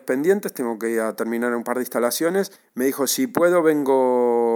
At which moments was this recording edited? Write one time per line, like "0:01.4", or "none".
0:02.6